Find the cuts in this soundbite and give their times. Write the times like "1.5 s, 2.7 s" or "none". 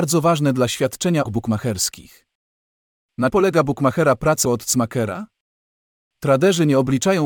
1.3 s, 3.3 s, 4.5 s